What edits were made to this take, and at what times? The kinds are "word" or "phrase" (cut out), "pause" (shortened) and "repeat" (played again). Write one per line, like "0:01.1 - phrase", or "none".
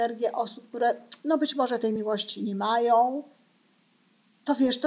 none